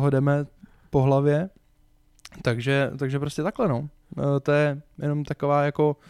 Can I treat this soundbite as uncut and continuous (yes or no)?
yes